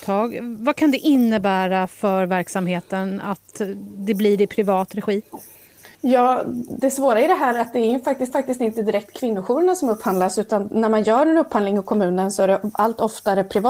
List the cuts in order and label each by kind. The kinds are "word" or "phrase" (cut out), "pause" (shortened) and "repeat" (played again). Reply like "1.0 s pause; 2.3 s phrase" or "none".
5.9 s pause; 8.3 s repeat

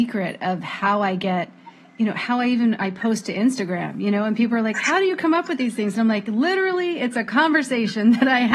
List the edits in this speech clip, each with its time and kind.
none

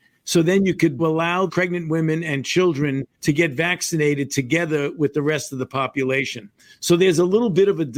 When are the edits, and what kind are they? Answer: 1.0 s phrase; 1.5 s word; 3.1 s pause

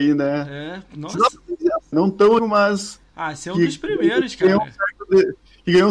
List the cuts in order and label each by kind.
1.9 s word; 2.4 s word

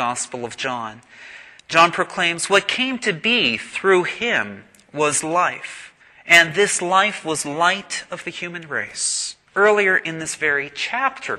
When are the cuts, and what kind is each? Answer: 1.6 s pause; 6.0 s pause; 9.5 s pause

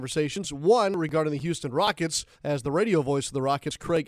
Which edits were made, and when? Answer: 2.3 s pause

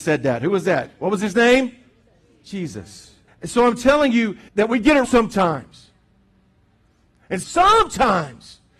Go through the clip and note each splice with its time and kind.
1.0 s pause; 3.3 s pause; 4.5 s word; 5.0 s word; 7.4 s word

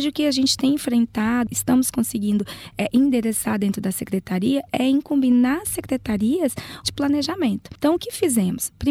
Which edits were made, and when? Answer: 6.8 s phrase

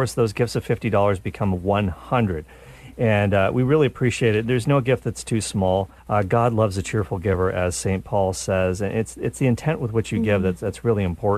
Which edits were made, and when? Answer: 6.0 s pause

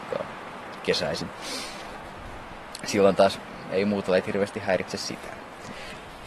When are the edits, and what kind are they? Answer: none

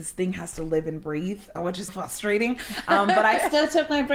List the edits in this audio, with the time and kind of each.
1.6 s word; 1.9 s word

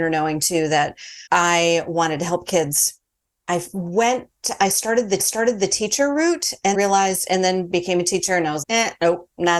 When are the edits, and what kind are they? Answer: 1.3 s pause; 3.2 s pause; 5.2 s repeat; 6.7 s word; 8.6 s word

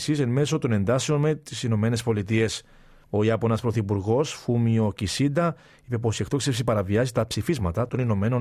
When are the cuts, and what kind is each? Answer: none

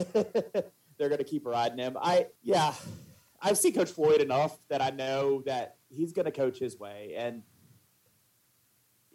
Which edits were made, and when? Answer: 2.4 s pause; 5.8 s pause

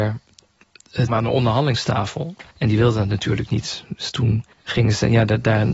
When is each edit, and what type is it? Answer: 1.1 s word; 2.5 s pause; 4.5 s pause

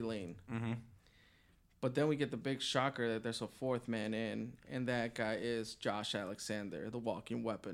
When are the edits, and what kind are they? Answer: none

